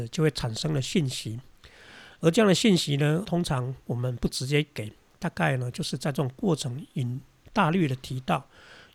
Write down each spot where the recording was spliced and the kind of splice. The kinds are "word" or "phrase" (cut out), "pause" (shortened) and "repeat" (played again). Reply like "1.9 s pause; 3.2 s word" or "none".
3.2 s word

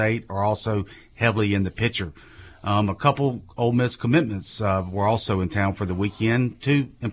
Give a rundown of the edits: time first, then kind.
none

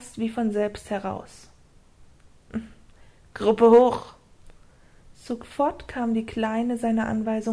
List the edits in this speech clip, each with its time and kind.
none

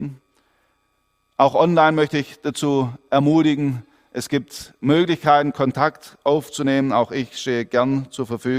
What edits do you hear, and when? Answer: none

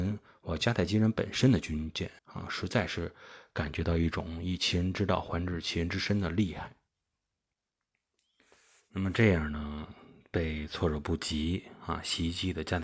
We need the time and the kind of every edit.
2.2 s pause

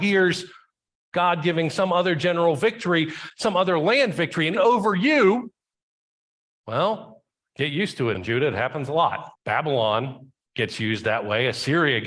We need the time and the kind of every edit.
4.5 s word; 8.1 s word; 9.3 s pause

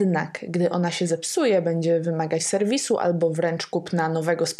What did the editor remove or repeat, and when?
2.4 s word

